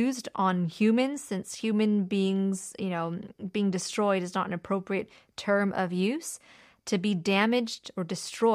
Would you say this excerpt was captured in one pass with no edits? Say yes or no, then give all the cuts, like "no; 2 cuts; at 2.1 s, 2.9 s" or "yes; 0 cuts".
yes; 0 cuts